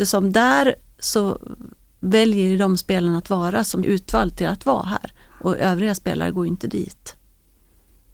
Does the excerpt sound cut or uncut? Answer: cut